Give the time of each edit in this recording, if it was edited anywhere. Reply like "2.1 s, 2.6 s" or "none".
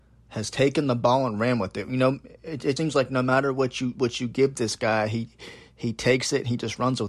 2.8 s

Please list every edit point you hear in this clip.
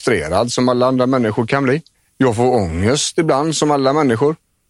1.9 s

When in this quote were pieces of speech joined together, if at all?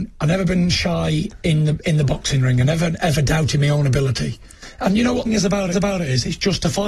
5.3 s, 5.7 s

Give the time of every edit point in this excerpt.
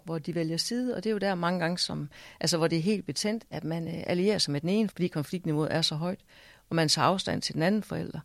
4.9 s

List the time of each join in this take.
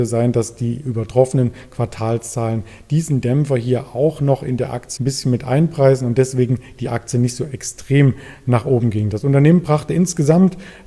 5.0 s

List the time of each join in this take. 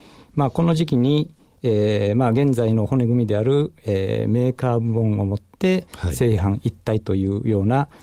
none

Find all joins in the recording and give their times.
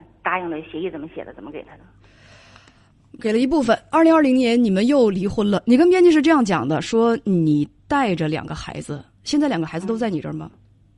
none

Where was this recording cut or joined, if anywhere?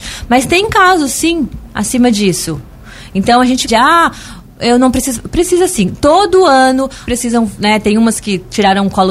3.7 s, 7.1 s

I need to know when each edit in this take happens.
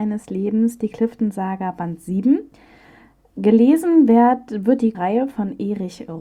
4.9 s

